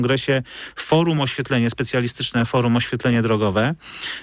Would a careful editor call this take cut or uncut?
uncut